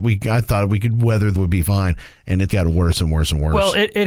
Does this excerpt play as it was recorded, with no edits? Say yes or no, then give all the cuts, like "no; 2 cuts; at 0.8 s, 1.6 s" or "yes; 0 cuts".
no; 2 cuts; at 1.4 s, 2.5 s